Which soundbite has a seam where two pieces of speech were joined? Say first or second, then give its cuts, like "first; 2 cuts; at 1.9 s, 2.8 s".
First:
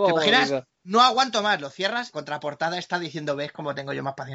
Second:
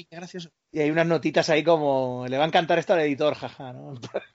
first; 1 cut; at 2.1 s